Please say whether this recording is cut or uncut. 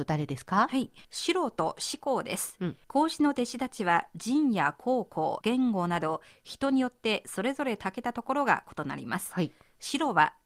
cut